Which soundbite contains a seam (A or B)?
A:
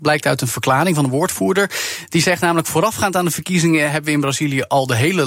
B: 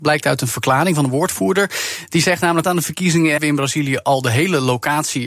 B